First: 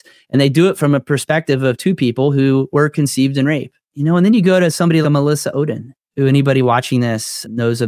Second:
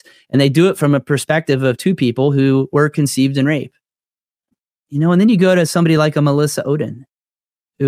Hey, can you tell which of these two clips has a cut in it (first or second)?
first